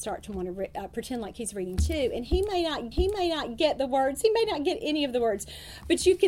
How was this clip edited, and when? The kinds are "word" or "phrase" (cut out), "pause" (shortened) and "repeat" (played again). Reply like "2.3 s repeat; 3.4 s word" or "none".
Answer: 2.9 s repeat